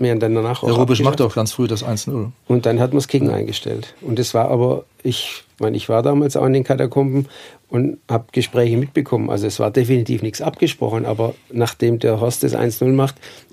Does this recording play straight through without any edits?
no; 1 cut; at 8.3 s

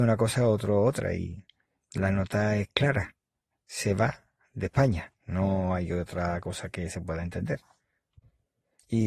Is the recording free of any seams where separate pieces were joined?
yes; 0 cuts

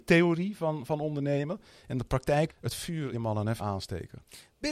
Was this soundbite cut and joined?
yes; 3 cuts; at 2.5 s, 3.1 s, 3.6 s

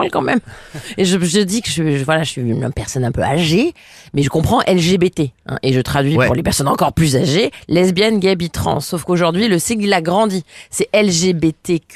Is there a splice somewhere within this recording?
no; 0 cuts

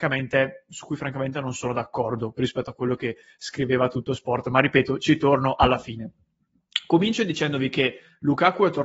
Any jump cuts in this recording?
no; 0 cuts

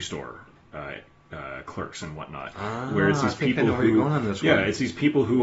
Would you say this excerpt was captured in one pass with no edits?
yes; 0 cuts

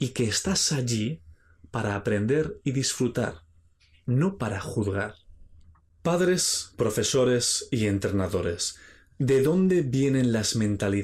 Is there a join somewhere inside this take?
no; 0 cuts

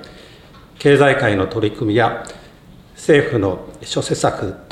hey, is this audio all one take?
yes; 0 cuts

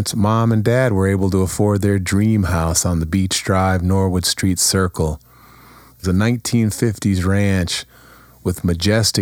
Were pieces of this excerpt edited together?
yes; 1 cut; at 6.0 s

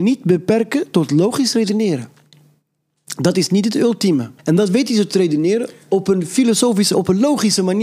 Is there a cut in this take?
yes; 1 cut; at 4.4 s

